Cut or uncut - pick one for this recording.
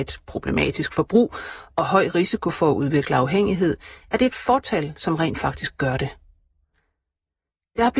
uncut